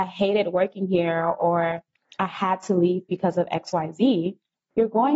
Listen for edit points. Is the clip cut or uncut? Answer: uncut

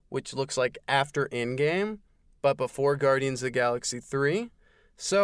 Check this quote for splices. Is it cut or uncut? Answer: uncut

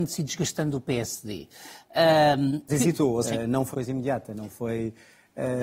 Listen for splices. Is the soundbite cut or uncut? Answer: cut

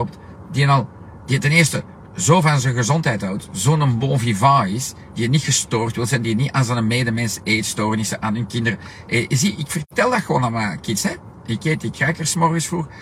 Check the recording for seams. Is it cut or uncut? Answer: uncut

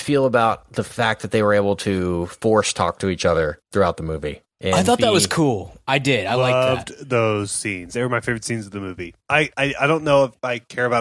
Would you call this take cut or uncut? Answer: cut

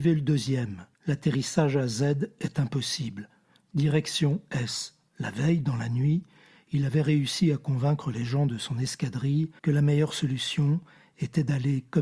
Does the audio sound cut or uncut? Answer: cut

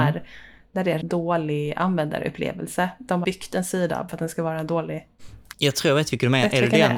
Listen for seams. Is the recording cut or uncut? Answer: cut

